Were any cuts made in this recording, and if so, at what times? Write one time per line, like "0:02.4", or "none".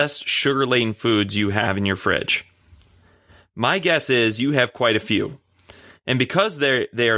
none